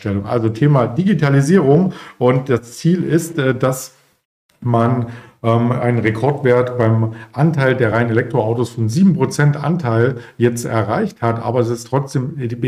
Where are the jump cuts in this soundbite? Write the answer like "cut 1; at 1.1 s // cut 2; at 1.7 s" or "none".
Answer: none

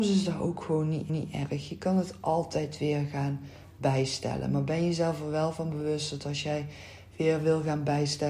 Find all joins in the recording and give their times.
cut 1; at 1.1 s

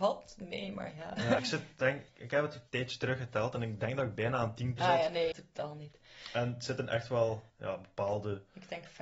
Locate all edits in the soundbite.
cut 1; at 1.4 s // cut 2; at 2.1 s // cut 3; at 2.7 s // cut 4; at 4.8 s // cut 5; at 5.3 s // cut 6; at 7.5 s

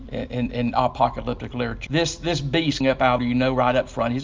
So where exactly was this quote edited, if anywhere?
cut 1; at 1.9 s // cut 2; at 2.8 s // cut 3; at 3.2 s

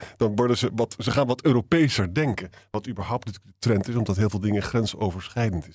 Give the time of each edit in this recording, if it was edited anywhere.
none

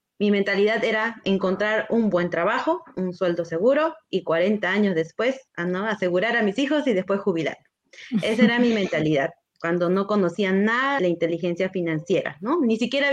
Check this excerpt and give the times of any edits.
cut 1; at 5.5 s // cut 2; at 11.0 s

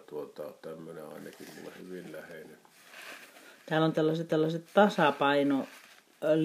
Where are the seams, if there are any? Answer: cut 1; at 4.3 s

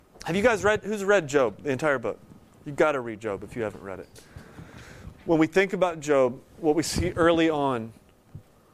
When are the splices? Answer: none

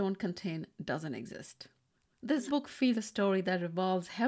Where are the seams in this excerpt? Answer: cut 1; at 2.5 s // cut 2; at 2.9 s

